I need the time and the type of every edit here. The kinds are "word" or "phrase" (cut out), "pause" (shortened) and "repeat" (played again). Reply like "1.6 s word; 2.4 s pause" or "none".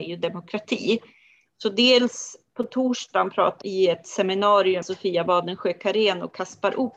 3.6 s word; 4.8 s word